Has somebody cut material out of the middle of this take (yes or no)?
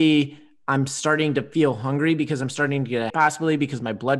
yes